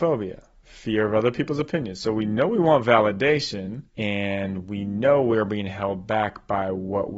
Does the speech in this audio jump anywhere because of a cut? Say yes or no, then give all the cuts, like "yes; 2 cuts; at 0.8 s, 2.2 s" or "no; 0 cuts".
yes; 1 cut; at 3.9 s